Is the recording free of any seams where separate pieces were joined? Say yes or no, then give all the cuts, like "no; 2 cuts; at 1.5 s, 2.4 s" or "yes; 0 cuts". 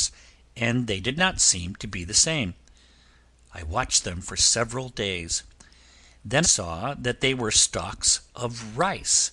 no; 1 cut; at 6.4 s